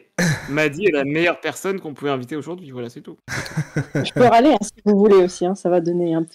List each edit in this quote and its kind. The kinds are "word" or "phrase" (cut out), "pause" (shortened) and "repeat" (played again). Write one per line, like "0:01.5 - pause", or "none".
0:03.2 - pause

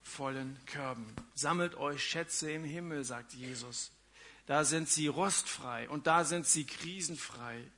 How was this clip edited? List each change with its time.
0:01.3 - pause

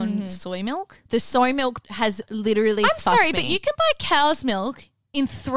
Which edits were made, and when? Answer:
0:01.1 - pause

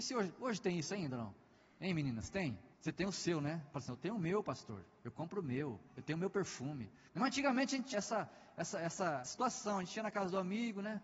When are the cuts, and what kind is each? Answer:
0:02.7 - pause
0:07.1 - pause
0:07.9 - word
0:09.3 - word

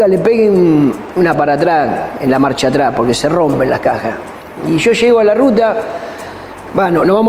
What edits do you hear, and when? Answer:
0:01.3 - word

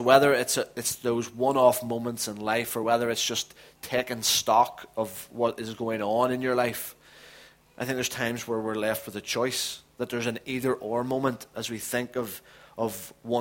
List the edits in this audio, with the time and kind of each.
none

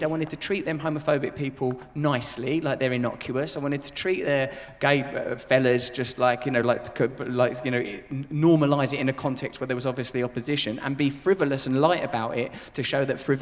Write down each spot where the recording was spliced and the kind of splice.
none

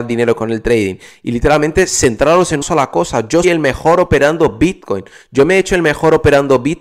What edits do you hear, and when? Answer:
0:02.6 - word
0:03.4 - word

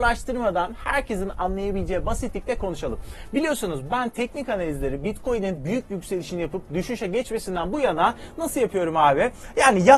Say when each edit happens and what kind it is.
none

